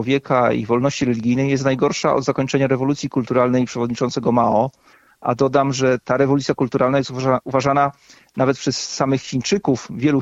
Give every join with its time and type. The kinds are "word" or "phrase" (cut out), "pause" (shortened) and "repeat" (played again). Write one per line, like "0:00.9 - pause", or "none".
none